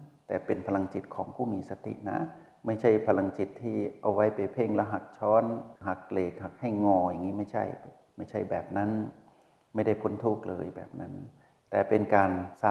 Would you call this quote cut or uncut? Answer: cut